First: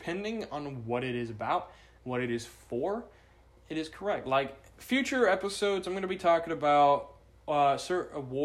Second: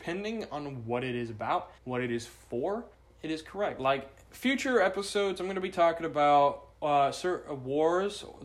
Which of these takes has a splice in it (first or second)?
second